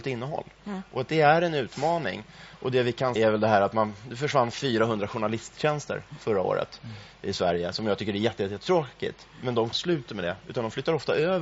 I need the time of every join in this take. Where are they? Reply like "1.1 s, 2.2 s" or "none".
3.2 s, 9.7 s, 10.1 s